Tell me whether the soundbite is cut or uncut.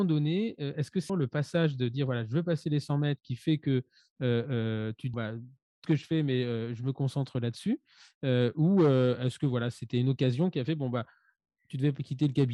cut